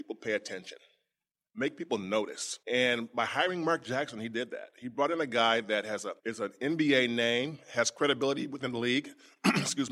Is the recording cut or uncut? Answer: cut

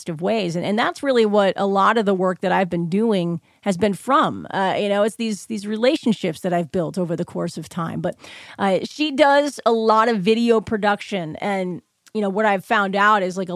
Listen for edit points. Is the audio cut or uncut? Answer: uncut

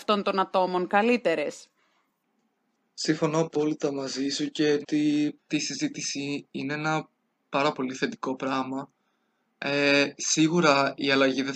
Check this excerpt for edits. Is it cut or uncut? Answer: cut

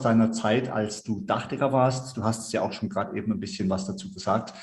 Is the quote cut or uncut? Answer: uncut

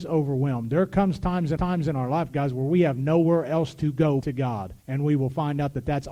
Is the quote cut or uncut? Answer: cut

